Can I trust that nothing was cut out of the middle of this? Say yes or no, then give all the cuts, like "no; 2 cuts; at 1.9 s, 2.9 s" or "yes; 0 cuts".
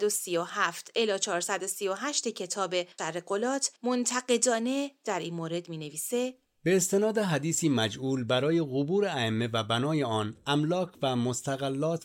no; 2 cuts; at 3.0 s, 3.8 s